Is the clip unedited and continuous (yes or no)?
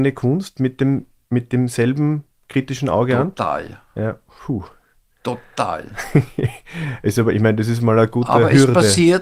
yes